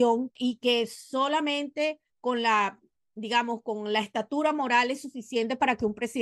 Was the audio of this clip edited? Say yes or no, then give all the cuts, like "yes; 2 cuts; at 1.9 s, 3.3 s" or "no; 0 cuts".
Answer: no; 0 cuts